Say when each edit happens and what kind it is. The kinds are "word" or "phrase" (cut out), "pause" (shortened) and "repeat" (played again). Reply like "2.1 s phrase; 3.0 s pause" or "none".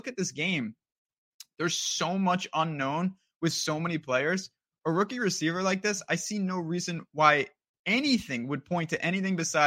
none